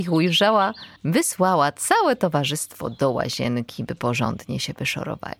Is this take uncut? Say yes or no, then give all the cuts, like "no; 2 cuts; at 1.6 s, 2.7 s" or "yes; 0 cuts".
no; 1 cut; at 1.0 s